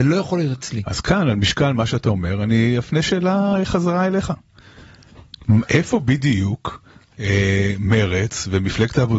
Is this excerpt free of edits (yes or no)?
yes